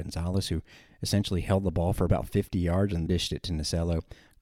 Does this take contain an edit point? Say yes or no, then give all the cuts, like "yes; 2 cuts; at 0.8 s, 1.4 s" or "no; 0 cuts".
yes; 1 cut; at 3.1 s